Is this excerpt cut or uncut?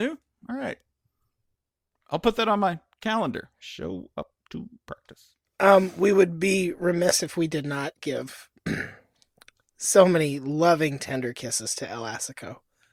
uncut